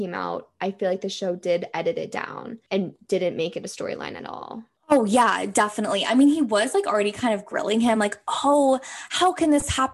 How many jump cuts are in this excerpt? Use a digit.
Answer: 0